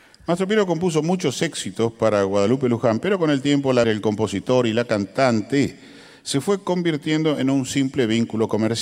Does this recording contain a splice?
yes; 1 cut; at 3.8 s

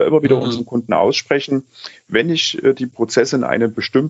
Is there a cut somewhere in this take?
no; 0 cuts

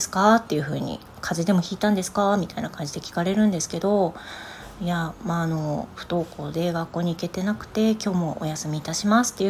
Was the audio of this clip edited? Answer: no; 0 cuts

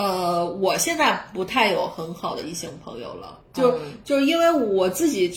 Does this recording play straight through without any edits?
no; 1 cut; at 3.4 s

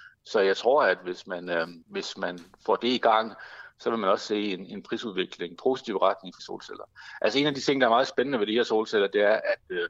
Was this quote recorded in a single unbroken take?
no; 3 cuts; at 1.8 s, 5.6 s, 6.4 s

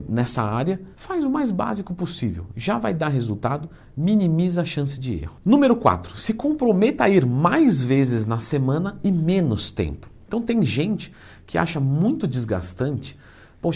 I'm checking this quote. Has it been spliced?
yes; 1 cut; at 0.9 s

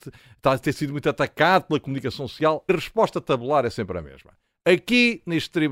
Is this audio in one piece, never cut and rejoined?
no; 1 cut; at 2.7 s

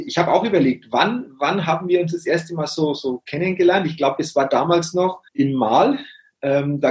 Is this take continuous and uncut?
no; 1 cut; at 5.3 s

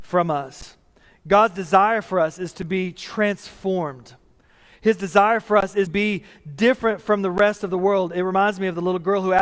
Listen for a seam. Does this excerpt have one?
yes; 1 cut; at 5.9 s

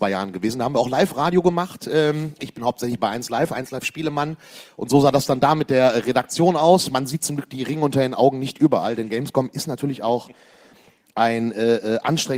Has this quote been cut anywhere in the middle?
no; 0 cuts

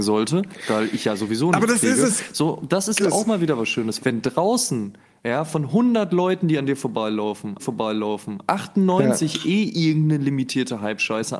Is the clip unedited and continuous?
no; 3 cuts; at 3.0 s, 4.0 s, 7.6 s

